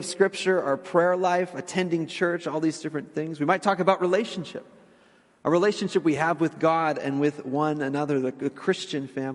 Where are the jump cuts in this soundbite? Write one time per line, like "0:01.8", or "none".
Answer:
none